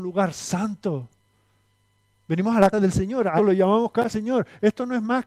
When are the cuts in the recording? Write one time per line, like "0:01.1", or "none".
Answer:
0:02.7
0:03.4
0:04.1